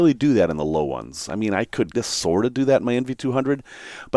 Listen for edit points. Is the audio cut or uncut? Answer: cut